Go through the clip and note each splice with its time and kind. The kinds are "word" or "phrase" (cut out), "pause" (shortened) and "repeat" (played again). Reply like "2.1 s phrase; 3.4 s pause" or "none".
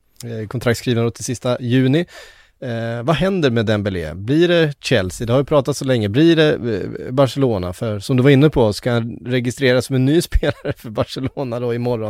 none